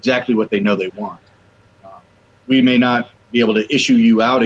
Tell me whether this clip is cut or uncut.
uncut